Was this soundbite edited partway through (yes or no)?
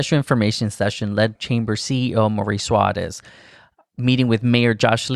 yes